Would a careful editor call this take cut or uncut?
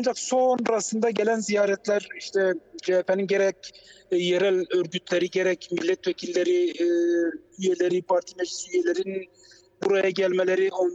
uncut